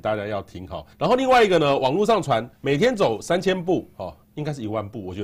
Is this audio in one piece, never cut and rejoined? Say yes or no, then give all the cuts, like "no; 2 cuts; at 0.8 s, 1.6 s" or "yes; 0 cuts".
no; 3 cuts; at 0.9 s, 2.5 s, 4.2 s